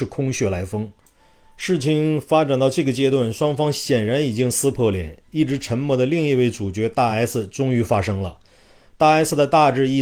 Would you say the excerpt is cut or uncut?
uncut